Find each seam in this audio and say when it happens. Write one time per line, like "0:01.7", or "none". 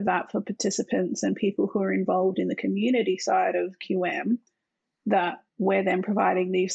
0:05.5